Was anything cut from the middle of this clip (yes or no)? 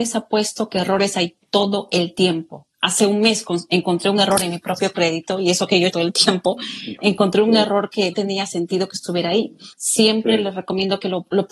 yes